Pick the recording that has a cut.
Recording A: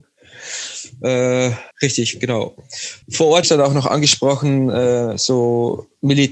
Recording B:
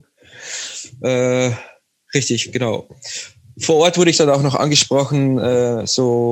A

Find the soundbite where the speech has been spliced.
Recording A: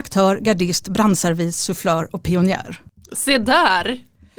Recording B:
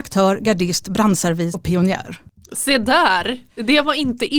B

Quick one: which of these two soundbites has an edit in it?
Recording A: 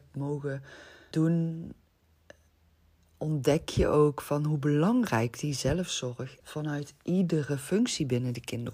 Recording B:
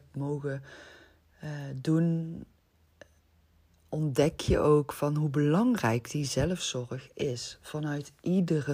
A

